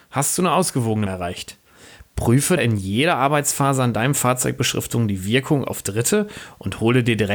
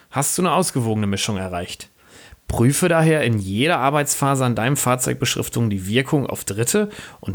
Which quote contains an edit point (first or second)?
first